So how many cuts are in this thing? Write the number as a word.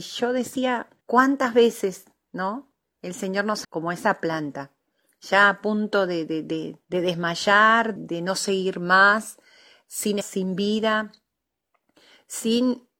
five